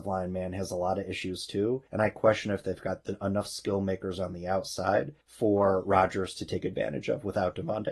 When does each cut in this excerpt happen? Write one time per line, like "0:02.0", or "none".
0:01.9
0:05.2